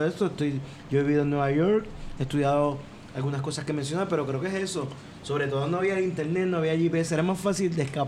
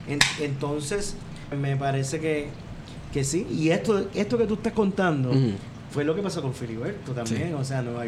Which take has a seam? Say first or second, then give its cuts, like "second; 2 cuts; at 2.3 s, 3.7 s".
second; 1 cut; at 1.5 s